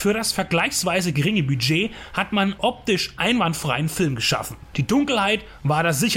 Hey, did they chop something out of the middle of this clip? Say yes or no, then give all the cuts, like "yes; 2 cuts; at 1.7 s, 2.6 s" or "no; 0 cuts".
yes; 1 cut; at 2.6 s